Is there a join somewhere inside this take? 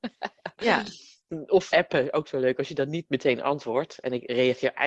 yes; 1 cut; at 1.7 s

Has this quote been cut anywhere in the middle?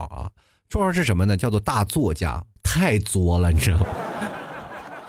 yes; 1 cut; at 2.6 s

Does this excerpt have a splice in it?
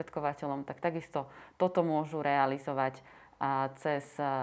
no; 0 cuts

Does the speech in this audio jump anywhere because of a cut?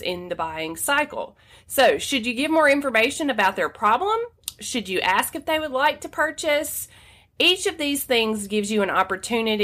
no; 0 cuts

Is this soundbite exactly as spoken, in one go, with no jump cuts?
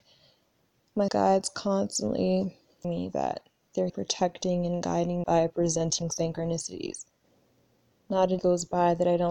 no; 5 cuts; at 1.1 s, 2.8 s, 3.9 s, 5.2 s, 8.4 s

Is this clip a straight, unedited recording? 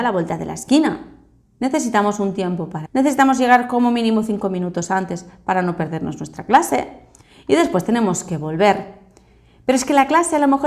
no; 1 cut; at 2.9 s

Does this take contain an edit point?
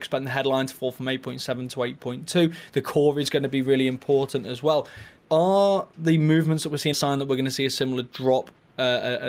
yes; 2 cuts; at 5.2 s, 6.9 s

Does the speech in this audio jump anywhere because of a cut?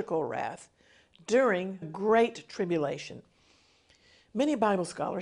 yes; 1 cut; at 1.8 s

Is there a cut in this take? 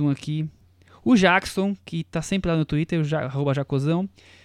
no; 0 cuts

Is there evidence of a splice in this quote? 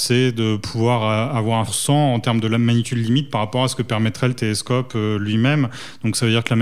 yes; 1 cut; at 1.7 s

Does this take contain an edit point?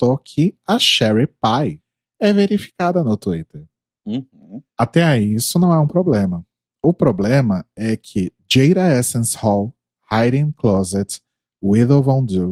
no; 0 cuts

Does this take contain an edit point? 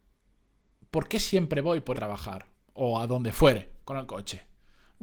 yes; 3 cuts; at 1.9 s, 2.5 s, 3.8 s

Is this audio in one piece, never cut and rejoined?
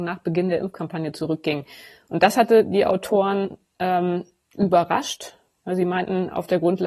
yes; 0 cuts

